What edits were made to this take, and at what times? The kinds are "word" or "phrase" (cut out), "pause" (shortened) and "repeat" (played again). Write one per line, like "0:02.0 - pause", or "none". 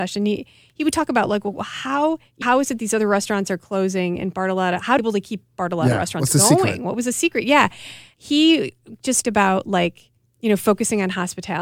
0:02.4 - word
0:05.0 - phrase
0:09.2 - word
0:10.2 - pause